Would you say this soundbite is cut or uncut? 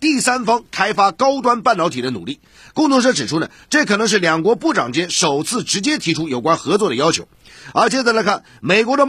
uncut